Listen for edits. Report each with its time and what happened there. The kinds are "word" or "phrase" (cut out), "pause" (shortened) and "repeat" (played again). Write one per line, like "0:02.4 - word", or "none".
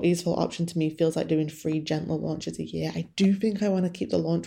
none

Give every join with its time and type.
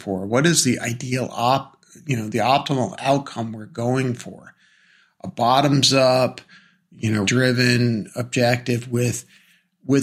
0:07.3 - word

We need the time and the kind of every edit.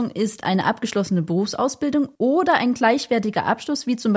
none

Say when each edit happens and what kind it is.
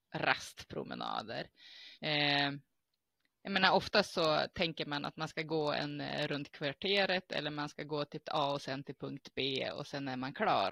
0:01.9 - pause
0:06.3 - word
0:08.2 - word

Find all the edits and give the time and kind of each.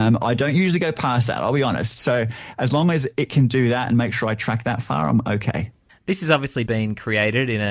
0:05.9 - pause
0:06.7 - word

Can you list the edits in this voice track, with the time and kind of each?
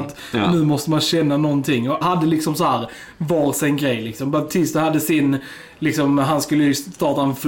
0:02.0 - word

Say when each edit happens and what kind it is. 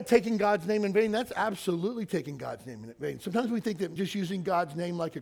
0:04.0 - word

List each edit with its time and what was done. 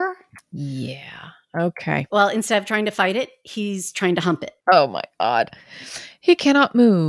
0:04.6 - pause

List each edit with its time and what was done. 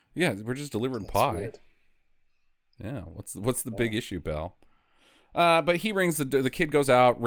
none

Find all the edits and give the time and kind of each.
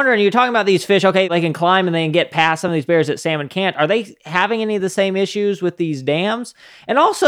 none

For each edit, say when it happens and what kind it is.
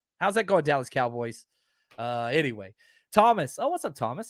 none

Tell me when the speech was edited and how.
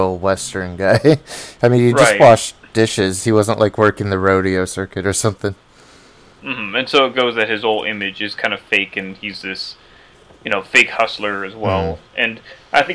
none

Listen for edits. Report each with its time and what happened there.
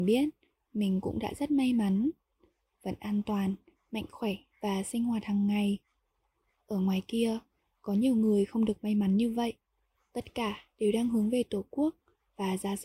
none

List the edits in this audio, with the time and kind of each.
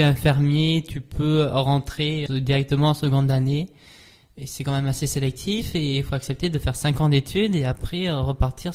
0:02.3 - word

